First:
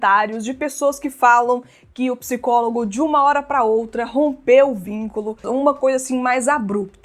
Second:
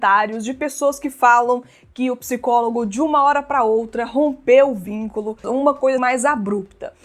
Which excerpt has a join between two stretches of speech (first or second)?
second